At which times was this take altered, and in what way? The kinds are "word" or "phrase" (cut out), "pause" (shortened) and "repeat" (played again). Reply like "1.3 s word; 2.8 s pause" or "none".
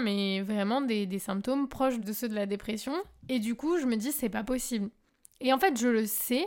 2.0 s word

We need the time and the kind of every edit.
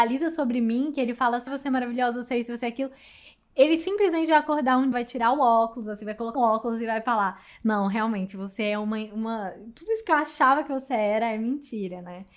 1.5 s word; 4.9 s word; 6.3 s word

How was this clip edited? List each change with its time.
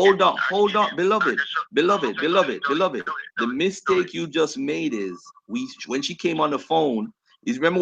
3.3 s pause

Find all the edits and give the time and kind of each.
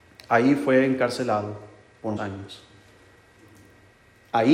2.2 s word

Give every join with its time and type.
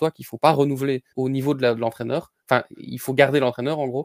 1.1 s pause

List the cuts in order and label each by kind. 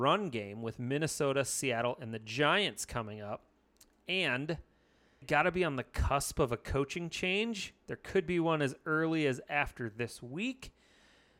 5.2 s word

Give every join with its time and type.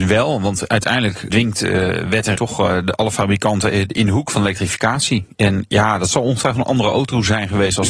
1.3 s word; 2.4 s word

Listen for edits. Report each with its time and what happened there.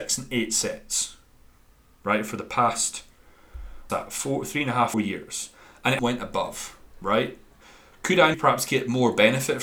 3.9 s word; 4.9 s word; 6.0 s word; 8.3 s word

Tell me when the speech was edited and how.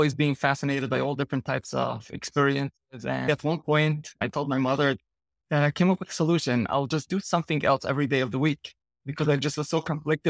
none

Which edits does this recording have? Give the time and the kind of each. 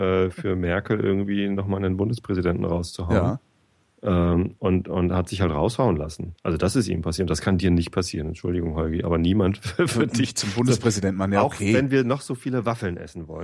none

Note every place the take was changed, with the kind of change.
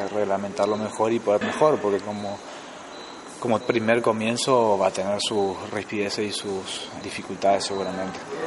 1.4 s word; 3.6 s word; 7.0 s word

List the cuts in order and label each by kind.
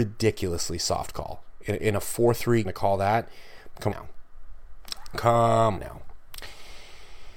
2.6 s phrase; 3.9 s word; 5.8 s word

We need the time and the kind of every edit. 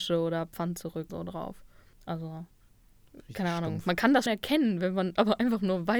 1.1 s word; 1.9 s pause; 4.3 s word

